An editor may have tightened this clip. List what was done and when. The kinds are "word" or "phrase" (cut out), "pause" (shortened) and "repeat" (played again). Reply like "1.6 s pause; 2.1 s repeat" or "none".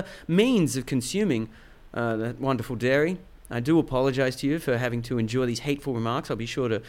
none